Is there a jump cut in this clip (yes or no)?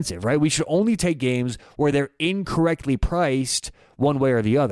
no